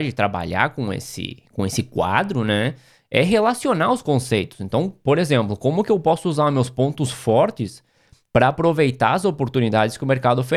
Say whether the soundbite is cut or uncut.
uncut